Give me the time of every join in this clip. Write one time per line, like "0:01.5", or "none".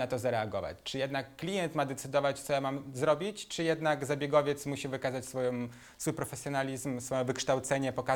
none